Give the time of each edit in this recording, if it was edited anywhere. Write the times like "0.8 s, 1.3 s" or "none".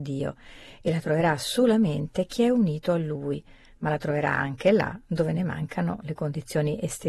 none